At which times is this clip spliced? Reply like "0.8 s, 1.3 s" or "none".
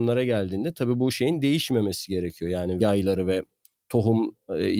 2.8 s